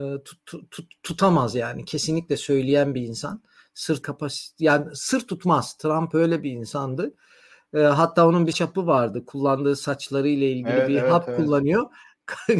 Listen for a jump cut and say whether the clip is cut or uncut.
cut